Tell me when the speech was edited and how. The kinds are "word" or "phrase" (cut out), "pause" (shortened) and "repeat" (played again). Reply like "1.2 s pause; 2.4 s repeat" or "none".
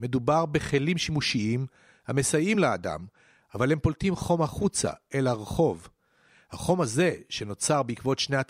none

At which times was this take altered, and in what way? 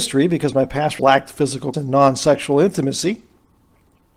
1.0 s word; 1.7 s word

